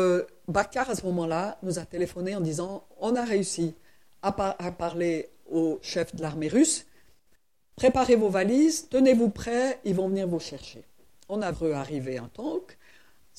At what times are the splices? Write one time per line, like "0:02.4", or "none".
0:11.5